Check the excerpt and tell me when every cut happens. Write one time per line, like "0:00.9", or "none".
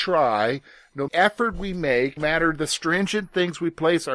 0:01.1
0:02.2